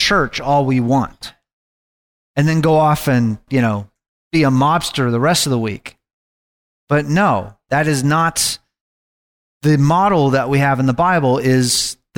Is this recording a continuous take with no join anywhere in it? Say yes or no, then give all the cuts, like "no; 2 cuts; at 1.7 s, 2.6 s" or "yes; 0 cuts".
yes; 0 cuts